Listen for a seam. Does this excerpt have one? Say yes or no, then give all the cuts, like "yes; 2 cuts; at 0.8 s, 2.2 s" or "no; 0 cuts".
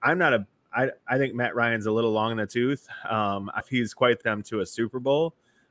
yes; 2 cuts; at 3.6 s, 4.2 s